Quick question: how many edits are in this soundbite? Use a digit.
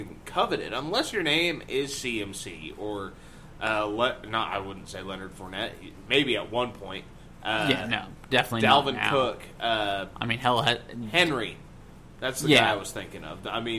0